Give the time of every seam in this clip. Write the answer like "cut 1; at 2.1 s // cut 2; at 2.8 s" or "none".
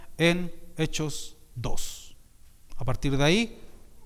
none